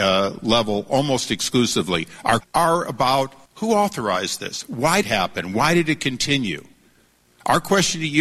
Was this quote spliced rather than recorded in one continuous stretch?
yes; 3 cuts; at 2.4 s, 3.5 s, 5.0 s

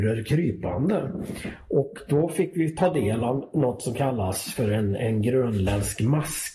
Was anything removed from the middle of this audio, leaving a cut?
no; 0 cuts

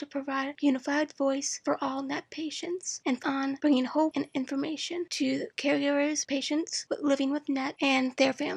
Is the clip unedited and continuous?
no; 1 cut; at 3.2 s

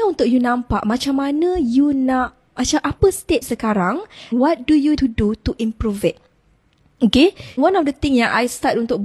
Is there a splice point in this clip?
yes; 5 cuts; at 2.6 s, 3.4 s, 4.3 s, 5.0 s, 7.6 s

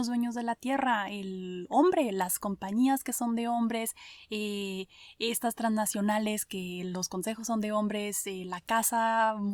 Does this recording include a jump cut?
no; 0 cuts

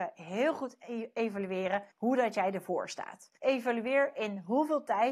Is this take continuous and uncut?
no; 2 cuts; at 1.9 s, 3.4 s

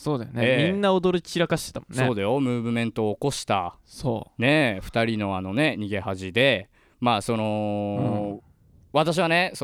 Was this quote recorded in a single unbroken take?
yes; 0 cuts

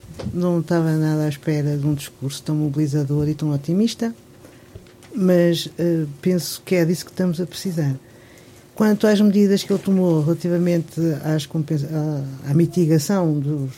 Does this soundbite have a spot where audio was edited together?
no; 0 cuts

